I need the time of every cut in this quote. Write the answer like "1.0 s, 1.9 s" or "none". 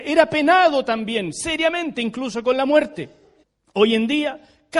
3.4 s

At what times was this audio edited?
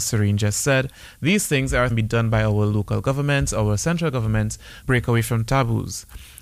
1.9 s, 4.8 s

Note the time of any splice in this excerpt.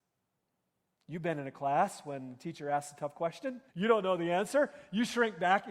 3.7 s

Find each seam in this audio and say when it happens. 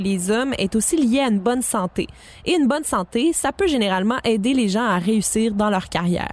none

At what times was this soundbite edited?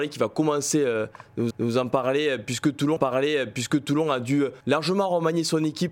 1.5 s, 3.0 s, 4.6 s

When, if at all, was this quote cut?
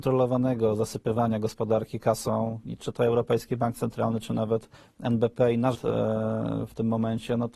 2.6 s, 4.7 s, 5.7 s

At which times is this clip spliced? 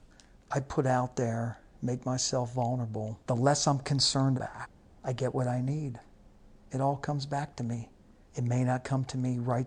3.2 s, 4.4 s

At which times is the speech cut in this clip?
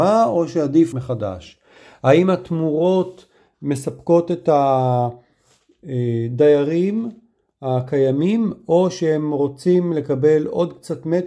0.9 s

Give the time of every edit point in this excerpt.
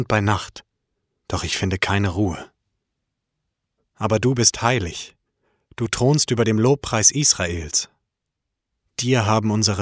none

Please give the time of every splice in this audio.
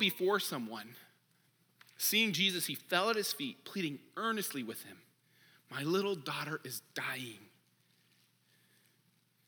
1.5 s

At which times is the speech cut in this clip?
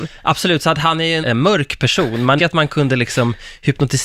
1.2 s, 2.4 s

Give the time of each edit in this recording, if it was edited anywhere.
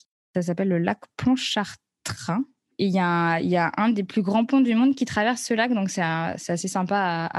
none

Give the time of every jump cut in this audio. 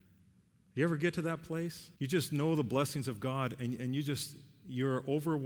2.0 s

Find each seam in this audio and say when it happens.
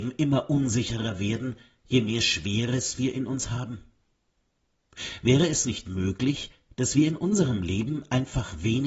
none

